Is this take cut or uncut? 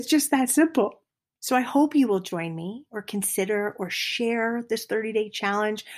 uncut